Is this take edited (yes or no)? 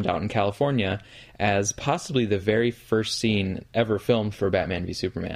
no